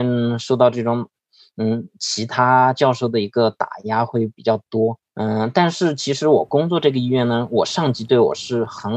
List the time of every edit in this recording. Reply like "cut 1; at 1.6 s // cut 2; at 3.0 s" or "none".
cut 1; at 5.1 s

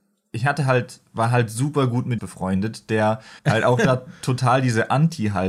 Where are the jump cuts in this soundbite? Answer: cut 1; at 2.2 s // cut 2; at 3.4 s

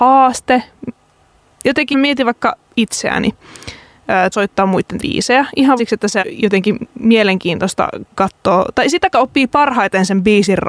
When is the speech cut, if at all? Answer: cut 1; at 1.9 s // cut 2; at 4.3 s // cut 3; at 5.0 s // cut 4; at 5.8 s // cut 5; at 6.2 s // cut 6; at 9.1 s

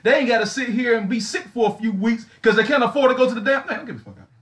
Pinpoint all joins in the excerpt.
none

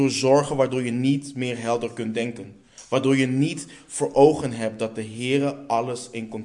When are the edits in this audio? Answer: none

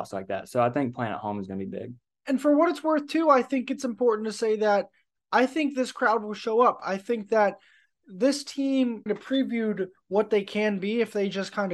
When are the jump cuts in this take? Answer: cut 1; at 9.1 s

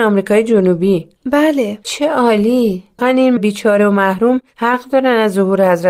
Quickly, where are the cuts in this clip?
cut 1; at 3.0 s // cut 2; at 3.4 s

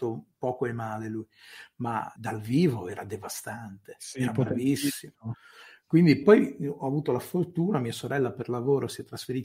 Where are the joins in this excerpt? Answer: cut 1; at 2.2 s // cut 2; at 6.2 s

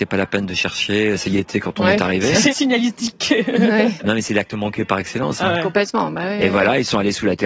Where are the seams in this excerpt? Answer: cut 1; at 2.5 s

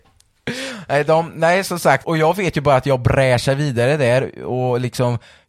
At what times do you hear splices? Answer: cut 1; at 2.0 s

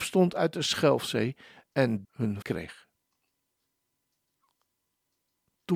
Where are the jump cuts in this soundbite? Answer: cut 1; at 2.0 s // cut 2; at 2.4 s

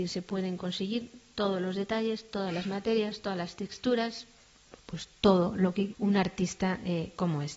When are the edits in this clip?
cut 1; at 5.9 s

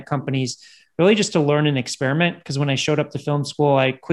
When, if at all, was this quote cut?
none

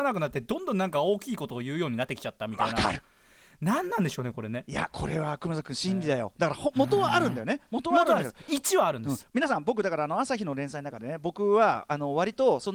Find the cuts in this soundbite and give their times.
none

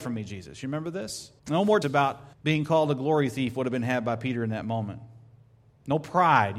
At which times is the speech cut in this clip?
cut 1; at 1.4 s // cut 2; at 1.8 s // cut 3; at 2.3 s

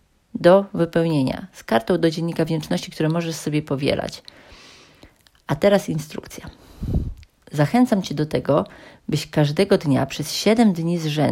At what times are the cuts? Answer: none

